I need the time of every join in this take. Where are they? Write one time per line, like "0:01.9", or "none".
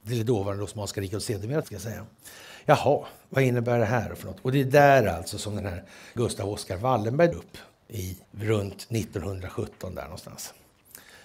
0:01.6
0:06.2
0:07.3
0:08.2